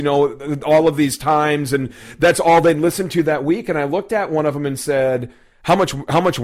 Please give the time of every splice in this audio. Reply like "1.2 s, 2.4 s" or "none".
none